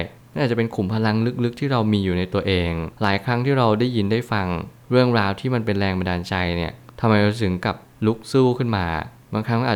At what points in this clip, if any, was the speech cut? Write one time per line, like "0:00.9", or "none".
0:02.9

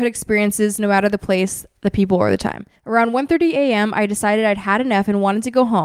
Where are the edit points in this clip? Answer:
0:02.8

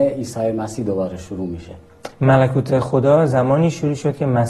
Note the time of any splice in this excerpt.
0:02.1

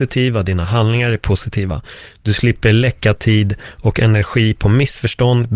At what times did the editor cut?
none

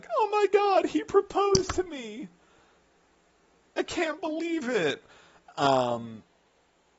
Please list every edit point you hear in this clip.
none

